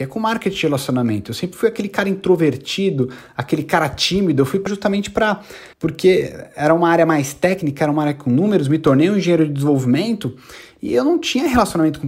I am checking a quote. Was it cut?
yes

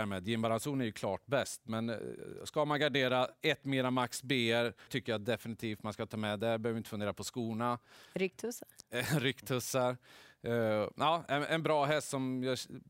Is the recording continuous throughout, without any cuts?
no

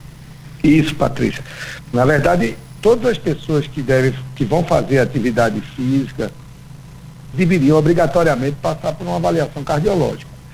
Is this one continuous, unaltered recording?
no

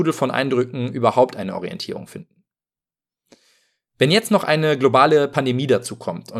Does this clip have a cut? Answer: no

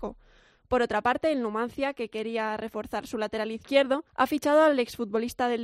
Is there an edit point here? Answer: yes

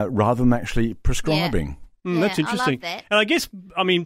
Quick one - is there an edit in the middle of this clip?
no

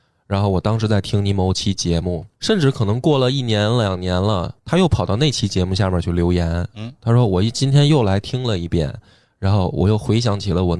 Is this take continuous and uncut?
no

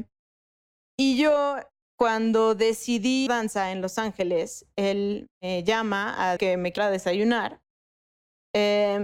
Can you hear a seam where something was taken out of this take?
yes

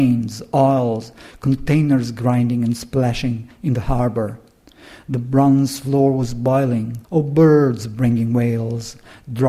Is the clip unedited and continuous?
no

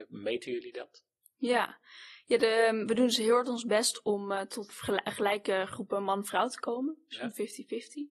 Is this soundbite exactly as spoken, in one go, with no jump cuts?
yes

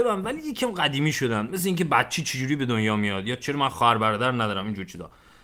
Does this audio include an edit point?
no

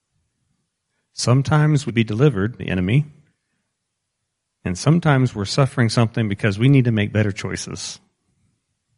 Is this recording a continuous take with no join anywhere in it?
no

